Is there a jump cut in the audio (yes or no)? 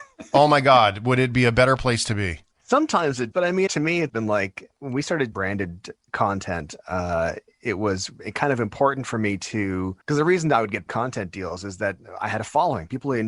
yes